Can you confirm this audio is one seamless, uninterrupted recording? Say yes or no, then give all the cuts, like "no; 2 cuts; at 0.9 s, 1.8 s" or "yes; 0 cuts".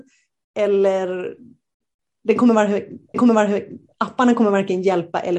no; 1 cut; at 3.1 s